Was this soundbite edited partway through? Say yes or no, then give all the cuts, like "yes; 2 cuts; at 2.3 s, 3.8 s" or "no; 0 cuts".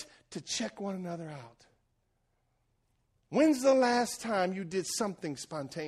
no; 0 cuts